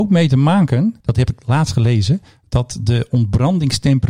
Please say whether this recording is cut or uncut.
cut